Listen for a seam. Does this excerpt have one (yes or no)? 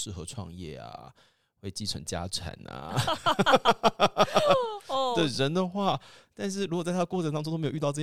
no